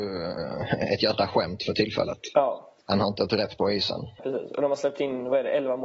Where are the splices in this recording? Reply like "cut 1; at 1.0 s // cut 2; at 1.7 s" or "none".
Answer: cut 1; at 2.8 s // cut 2; at 4.2 s